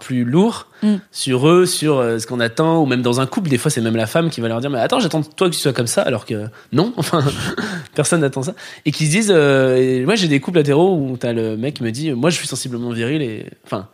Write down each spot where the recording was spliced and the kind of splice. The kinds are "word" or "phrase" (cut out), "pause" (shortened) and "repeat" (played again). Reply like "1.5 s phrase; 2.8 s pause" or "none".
none